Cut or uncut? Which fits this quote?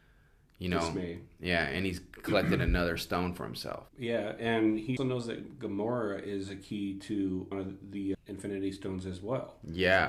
cut